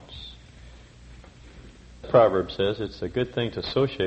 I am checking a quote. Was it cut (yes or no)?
yes